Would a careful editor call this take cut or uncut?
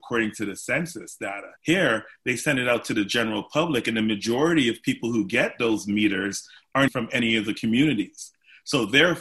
cut